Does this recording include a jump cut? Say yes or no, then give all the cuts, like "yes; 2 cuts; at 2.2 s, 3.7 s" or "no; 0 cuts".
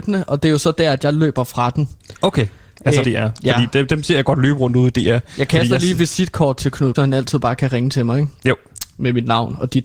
yes; 2 cuts; at 3.0 s, 6.9 s